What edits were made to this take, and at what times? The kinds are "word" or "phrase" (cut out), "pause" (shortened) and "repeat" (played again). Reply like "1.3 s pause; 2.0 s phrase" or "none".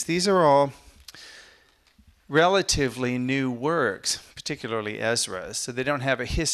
none